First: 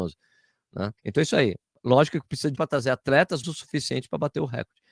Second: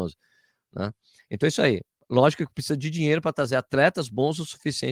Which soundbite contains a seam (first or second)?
first